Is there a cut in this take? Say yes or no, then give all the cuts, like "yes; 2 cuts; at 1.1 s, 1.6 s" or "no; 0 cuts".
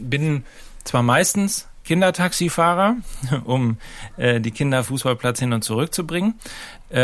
yes; 1 cut; at 4.8 s